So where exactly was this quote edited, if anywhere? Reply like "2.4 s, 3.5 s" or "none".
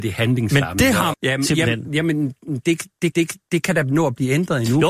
1.1 s, 3.1 s